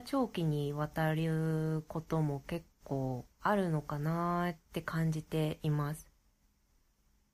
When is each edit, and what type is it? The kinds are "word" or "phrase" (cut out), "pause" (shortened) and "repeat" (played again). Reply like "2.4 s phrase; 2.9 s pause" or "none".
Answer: 3.3 s pause; 4.6 s pause